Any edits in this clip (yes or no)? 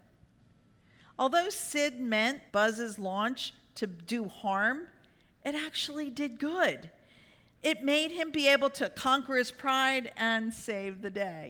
yes